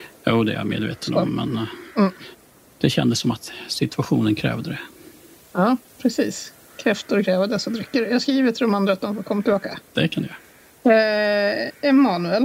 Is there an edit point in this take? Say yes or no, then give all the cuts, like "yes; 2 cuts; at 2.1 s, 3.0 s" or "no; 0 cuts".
no; 0 cuts